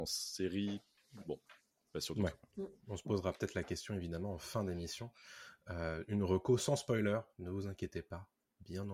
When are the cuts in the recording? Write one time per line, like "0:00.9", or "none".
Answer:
none